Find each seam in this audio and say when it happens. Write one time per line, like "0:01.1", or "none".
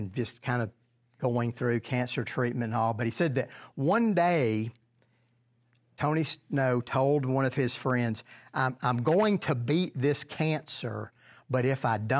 none